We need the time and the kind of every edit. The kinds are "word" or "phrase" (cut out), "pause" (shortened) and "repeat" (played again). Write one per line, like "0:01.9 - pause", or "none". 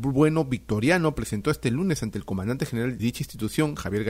0:03.0 - word